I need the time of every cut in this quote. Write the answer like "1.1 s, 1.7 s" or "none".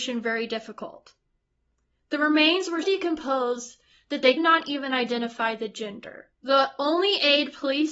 2.8 s, 4.4 s, 6.3 s